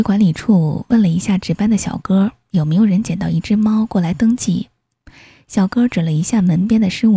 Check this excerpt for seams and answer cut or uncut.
uncut